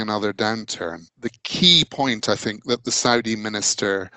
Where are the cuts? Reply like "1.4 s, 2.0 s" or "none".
1.1 s